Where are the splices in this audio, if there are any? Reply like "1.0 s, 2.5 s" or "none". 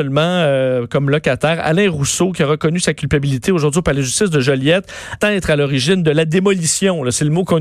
5.2 s